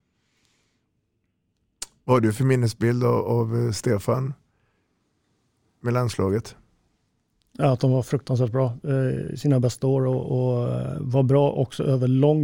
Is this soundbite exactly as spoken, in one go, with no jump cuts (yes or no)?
yes